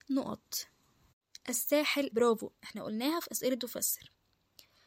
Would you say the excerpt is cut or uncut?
cut